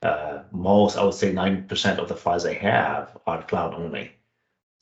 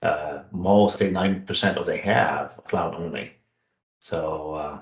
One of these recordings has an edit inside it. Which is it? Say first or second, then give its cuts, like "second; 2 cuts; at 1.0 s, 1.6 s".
second; 3 cuts; at 0.9 s, 1.9 s, 2.6 s